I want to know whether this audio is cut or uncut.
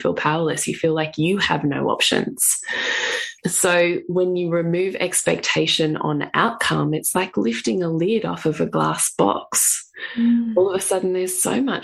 cut